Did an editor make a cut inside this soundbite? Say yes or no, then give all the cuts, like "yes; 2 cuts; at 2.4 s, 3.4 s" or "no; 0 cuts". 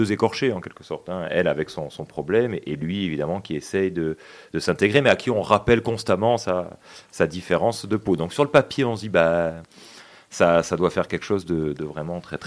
no; 0 cuts